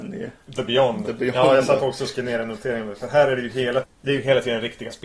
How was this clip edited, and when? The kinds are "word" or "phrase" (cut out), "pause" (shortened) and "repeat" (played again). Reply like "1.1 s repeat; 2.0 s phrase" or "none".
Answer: 3.8 s word